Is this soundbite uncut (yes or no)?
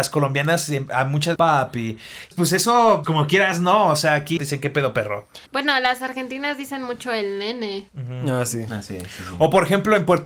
no